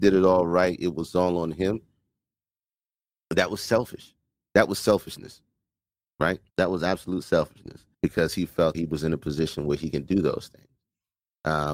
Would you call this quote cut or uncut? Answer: cut